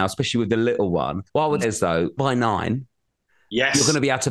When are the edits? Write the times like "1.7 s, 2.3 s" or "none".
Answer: 1.3 s, 1.6 s, 2.2 s

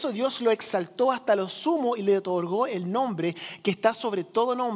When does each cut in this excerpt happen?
none

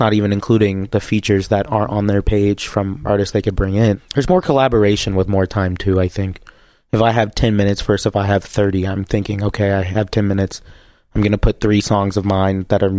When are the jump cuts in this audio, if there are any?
3.0 s

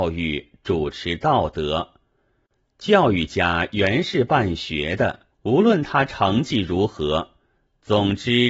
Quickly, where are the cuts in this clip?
5.3 s

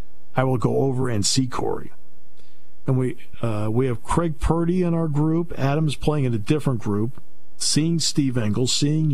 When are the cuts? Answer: none

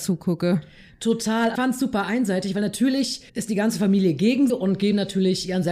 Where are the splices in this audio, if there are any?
1.5 s, 3.3 s, 4.5 s

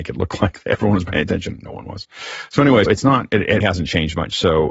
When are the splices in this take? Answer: 2.9 s, 3.6 s

